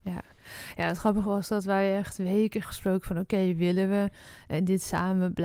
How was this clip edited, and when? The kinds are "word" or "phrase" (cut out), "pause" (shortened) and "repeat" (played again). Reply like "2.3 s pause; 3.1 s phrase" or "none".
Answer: 2.6 s phrase